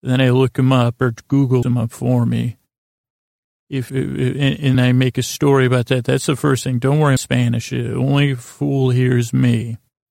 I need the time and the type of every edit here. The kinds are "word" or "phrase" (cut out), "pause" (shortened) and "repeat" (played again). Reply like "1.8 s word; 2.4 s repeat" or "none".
1.6 s word; 3.9 s word; 4.7 s word; 7.2 s phrase